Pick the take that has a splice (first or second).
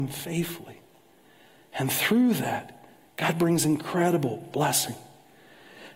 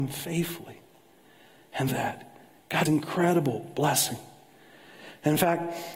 second